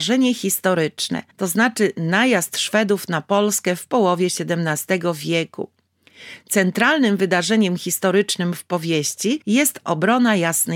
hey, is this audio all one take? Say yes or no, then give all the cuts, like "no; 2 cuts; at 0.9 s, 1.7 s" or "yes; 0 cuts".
no; 2 cuts; at 1.3 s, 9.4 s